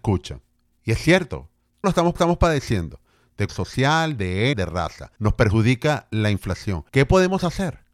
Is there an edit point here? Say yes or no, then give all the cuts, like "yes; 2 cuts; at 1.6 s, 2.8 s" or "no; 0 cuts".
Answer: yes; 6 cuts; at 1.8 s, 2.2 s, 3.5 s, 4.5 s, 5.2 s, 6.9 s